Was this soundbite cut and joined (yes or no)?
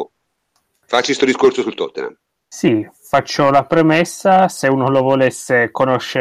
no